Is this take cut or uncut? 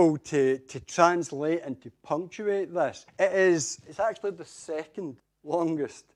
cut